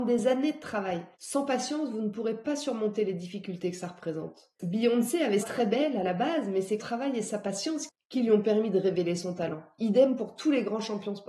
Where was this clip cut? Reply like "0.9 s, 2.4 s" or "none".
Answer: 1.1 s, 4.6 s, 5.4 s, 6.8 s

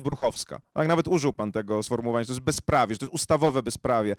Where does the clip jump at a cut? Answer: none

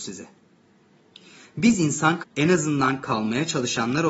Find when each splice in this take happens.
2.2 s

